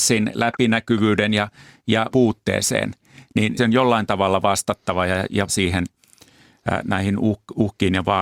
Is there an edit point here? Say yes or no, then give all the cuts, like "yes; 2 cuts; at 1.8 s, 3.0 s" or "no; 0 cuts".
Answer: yes; 3 cuts; at 2.1 s, 3.6 s, 5.5 s